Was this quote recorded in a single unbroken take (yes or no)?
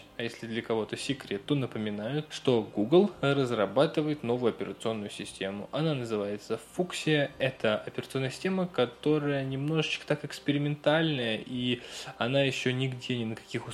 yes